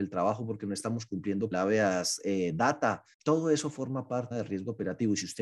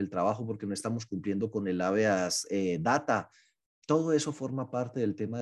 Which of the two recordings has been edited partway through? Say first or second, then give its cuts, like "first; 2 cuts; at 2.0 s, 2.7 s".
first; 3 cuts; at 1.5 s, 3.1 s, 4.3 s